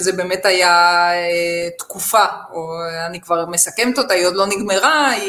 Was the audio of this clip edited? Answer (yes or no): no